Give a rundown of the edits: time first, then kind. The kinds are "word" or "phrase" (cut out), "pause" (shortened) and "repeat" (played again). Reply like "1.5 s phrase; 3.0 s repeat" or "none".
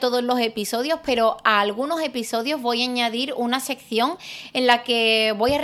none